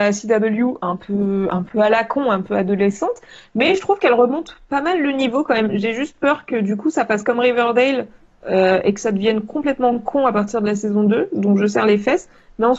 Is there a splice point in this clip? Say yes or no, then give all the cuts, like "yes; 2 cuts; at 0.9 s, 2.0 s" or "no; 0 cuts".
no; 0 cuts